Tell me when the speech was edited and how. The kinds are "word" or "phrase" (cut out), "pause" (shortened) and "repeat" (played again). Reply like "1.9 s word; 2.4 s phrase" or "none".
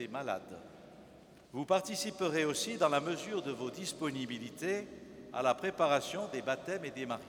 1.4 s pause